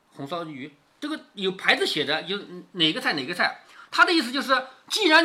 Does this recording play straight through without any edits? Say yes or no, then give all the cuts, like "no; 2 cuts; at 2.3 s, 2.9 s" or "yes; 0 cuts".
yes; 0 cuts